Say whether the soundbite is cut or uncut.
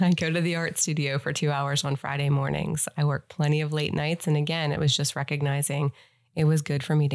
uncut